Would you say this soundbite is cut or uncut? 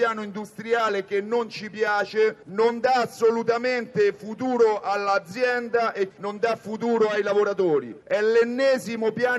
cut